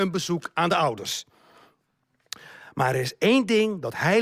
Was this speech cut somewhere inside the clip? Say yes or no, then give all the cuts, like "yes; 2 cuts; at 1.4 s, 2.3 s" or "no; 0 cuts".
no; 0 cuts